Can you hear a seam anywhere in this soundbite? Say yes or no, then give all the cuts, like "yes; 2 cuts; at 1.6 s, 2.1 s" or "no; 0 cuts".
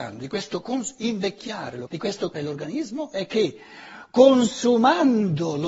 yes; 2 cuts; at 1.9 s, 2.3 s